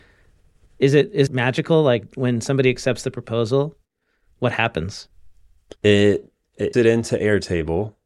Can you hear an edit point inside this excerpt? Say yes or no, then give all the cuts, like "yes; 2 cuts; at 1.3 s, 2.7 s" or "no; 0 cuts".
yes; 3 cuts; at 1.3 s, 5.8 s, 6.7 s